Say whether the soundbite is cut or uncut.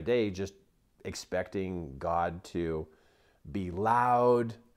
uncut